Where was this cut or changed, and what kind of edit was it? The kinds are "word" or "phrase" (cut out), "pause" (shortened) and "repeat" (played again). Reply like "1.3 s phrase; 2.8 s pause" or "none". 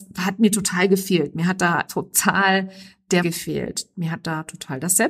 1.9 s word; 3.2 s word